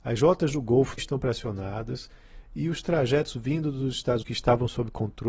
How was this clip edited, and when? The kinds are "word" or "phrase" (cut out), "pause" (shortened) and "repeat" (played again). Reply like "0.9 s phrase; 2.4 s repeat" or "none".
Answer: 1.0 s word; 4.2 s word